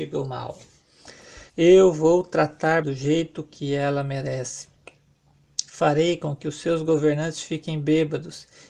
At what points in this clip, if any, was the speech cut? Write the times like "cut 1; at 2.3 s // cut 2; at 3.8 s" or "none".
cut 1; at 1.5 s // cut 2; at 2.8 s